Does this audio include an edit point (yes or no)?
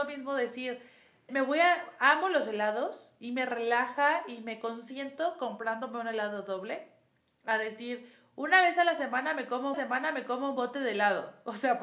yes